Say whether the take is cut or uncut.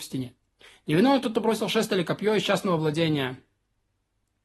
uncut